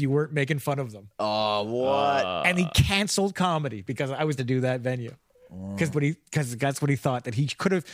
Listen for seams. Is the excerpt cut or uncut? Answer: cut